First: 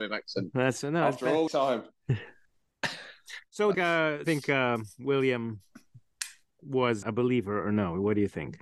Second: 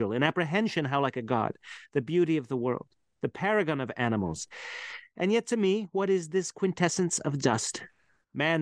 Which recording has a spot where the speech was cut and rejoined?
first; 4 cuts; at 1.5 s, 3.7 s, 4.2 s, 7.0 s

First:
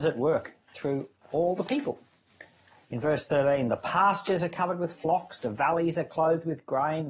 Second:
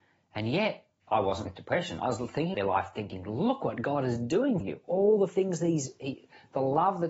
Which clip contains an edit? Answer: second; 4 cuts; at 1.0 s, 1.5 s, 2.5 s, 4.6 s

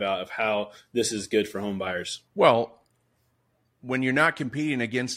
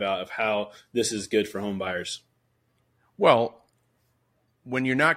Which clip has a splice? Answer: first; 1 cut; at 2.3 s

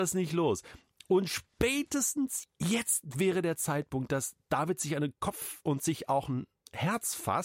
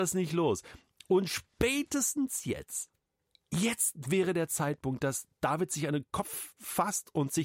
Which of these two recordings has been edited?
first; 2 cuts; at 2.4 s, 5.6 s

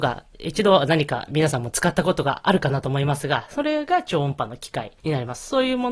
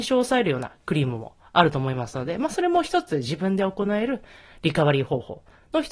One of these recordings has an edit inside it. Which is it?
first; 1 cut; at 5.0 s

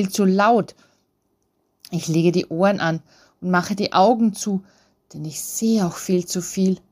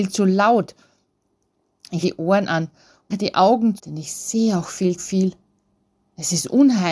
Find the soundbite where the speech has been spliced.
second; 4 cuts; at 2.0 s, 3.1 s, 3.8 s, 5.0 s

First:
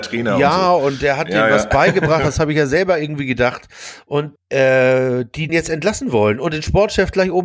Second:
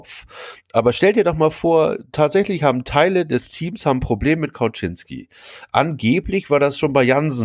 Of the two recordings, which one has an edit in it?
first; 2 cuts; at 4.4 s, 5.5 s

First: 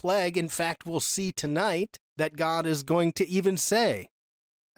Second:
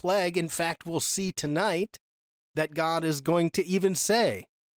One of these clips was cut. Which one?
first; 1 cut; at 2.1 s

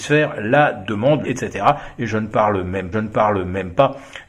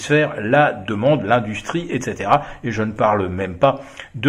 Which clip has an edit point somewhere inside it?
first; 2 cuts; at 1.2 s, 2.9 s

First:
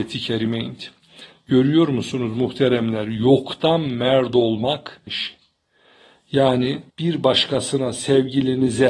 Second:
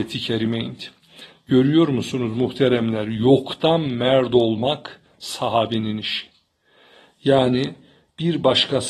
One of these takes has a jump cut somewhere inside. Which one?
first; 2 cuts; at 5.1 s, 6.9 s

